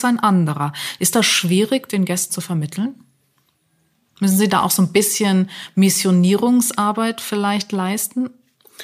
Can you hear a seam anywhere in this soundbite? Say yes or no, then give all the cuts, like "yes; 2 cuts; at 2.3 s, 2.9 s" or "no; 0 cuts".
yes; 1 cut; at 2.3 s